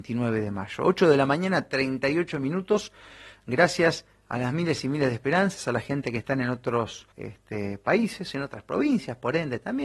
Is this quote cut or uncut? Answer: cut